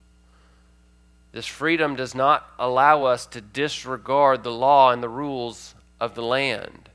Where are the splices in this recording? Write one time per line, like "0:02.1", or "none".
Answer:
none